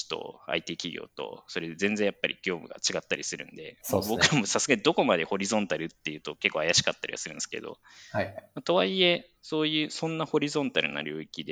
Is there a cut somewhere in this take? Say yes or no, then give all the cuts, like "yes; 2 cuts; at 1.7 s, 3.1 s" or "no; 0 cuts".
no; 0 cuts